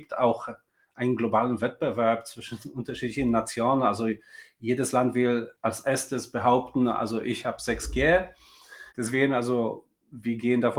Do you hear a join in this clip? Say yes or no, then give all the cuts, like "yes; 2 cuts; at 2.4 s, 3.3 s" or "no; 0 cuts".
no; 0 cuts